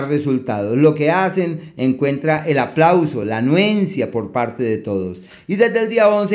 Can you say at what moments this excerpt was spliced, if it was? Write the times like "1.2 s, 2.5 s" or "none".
none